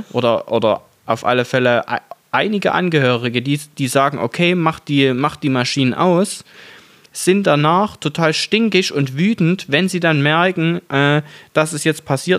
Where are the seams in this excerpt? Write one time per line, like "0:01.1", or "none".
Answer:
none